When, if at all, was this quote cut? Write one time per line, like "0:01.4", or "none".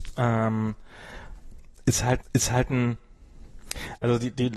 0:02.2